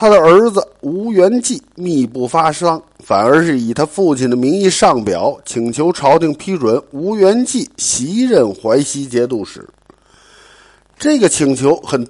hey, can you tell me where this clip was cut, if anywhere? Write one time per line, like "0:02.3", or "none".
none